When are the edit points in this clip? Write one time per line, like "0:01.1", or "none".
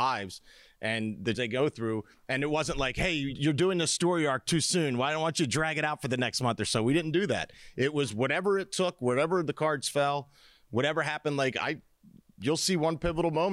0:01.3
0:03.3